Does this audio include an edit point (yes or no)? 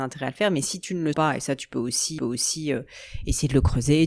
yes